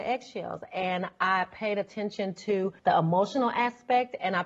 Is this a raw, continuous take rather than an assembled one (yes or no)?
no